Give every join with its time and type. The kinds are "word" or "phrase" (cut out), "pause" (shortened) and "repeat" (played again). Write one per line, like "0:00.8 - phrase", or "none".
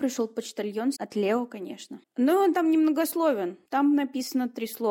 0:01.0 - phrase
0:02.1 - pause
0:03.6 - pause